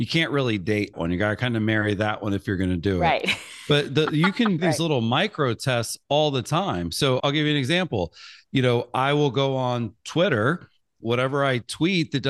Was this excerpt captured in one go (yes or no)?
no